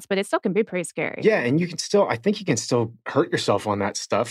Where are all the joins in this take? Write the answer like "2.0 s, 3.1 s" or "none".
none